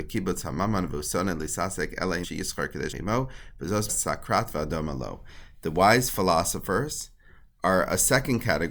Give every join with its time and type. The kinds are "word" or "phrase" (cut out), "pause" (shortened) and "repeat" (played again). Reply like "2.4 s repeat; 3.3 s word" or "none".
2.2 s word; 2.9 s word; 3.9 s word